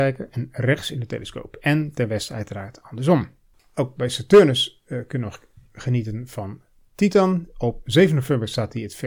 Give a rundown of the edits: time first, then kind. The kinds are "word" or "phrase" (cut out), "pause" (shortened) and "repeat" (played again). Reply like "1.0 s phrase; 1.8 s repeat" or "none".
none

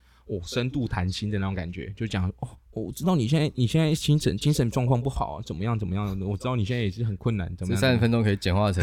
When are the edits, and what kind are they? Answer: 2.6 s pause

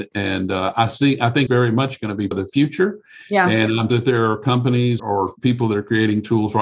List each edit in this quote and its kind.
1.5 s word; 2.3 s word; 3.9 s word; 5.0 s word

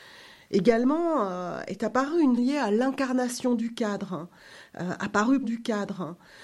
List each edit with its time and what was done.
2.4 s word; 5.4 s repeat

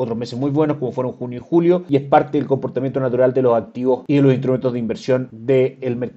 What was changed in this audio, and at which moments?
none

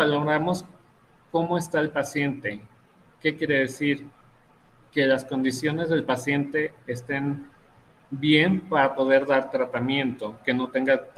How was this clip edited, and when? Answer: none

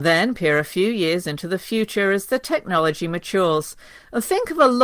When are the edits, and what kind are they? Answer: none

